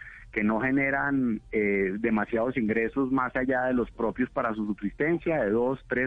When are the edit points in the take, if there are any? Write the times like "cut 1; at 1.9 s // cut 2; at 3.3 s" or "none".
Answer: none

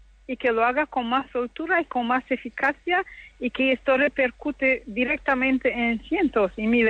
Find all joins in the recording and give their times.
none

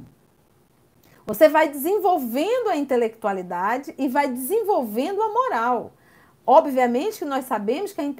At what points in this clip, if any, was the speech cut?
none

